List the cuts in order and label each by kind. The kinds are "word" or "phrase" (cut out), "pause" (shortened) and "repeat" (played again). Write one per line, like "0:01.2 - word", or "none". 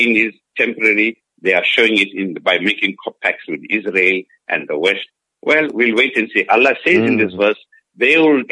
none